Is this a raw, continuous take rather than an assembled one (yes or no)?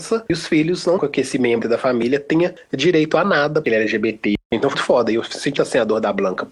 no